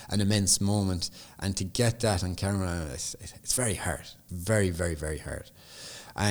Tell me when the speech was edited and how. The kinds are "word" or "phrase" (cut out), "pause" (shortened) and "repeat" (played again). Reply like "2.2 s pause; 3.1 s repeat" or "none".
4.3 s word